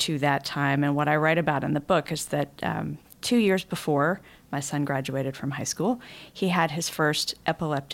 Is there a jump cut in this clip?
no; 0 cuts

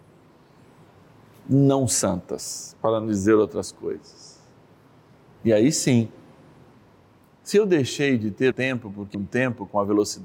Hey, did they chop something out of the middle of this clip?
yes; 2 cuts; at 8.5 s, 9.1 s

